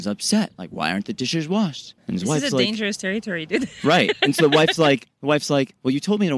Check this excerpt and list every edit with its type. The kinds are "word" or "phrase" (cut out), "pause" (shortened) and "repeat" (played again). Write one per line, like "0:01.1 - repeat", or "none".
0:02.0 - pause